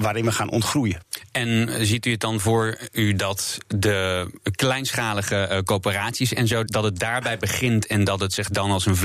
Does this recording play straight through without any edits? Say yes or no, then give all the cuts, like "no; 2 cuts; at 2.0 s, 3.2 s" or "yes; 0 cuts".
no; 1 cut; at 6.7 s